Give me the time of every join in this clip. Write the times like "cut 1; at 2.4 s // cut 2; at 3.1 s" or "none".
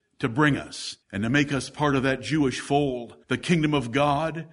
cut 1; at 1.0 s // cut 2; at 3.2 s